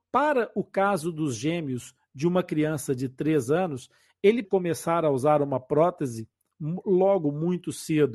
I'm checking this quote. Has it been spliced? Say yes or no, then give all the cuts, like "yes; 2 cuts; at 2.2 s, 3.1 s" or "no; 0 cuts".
yes; 1 cut; at 4.4 s